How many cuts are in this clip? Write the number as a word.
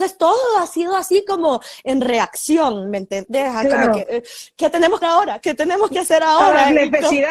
one